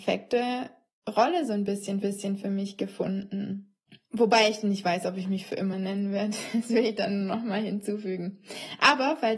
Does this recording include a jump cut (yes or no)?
yes